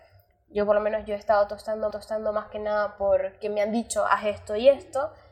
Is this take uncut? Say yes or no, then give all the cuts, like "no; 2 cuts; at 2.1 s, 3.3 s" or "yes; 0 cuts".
no; 1 cut; at 1.9 s